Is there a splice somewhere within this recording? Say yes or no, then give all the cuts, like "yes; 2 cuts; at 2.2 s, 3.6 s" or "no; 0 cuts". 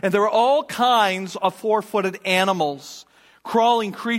no; 0 cuts